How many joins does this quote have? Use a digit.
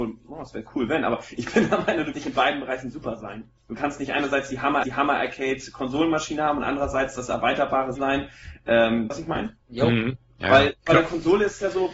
6